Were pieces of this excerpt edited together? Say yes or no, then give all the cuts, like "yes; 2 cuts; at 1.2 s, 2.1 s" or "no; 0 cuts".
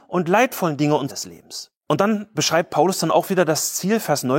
yes; 1 cut; at 1.1 s